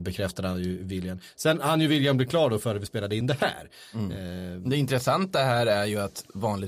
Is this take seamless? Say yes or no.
yes